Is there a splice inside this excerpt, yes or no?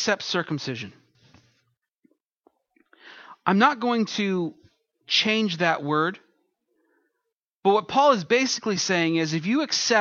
no